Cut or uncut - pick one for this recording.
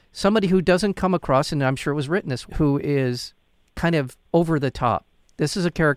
cut